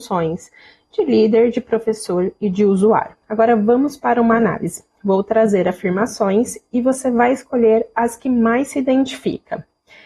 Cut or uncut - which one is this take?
cut